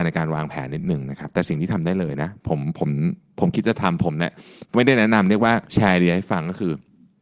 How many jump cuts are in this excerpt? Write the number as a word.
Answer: one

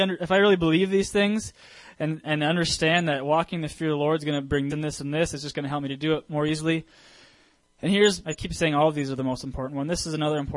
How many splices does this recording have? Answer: three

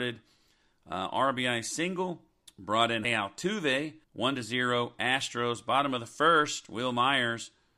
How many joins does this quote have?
three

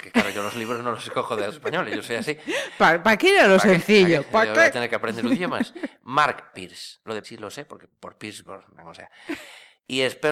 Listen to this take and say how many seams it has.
three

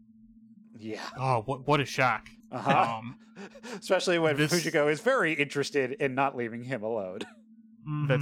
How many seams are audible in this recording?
one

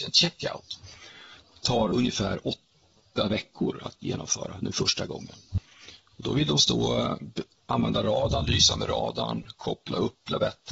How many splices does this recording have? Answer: zero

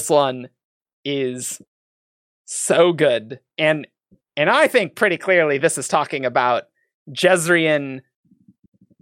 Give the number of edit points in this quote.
zero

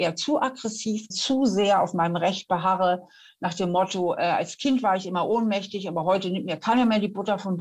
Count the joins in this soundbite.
one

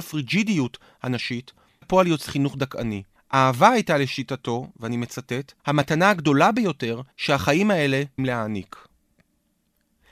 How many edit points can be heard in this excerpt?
six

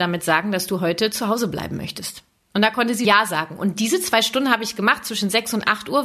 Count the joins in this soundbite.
one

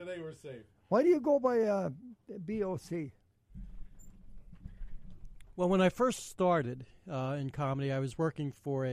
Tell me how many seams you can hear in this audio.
zero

